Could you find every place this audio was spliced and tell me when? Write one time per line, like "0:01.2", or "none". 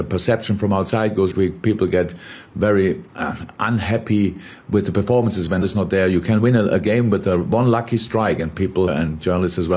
0:01.3
0:03.1
0:05.6
0:08.9